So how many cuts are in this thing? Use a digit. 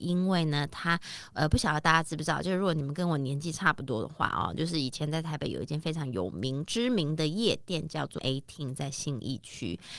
1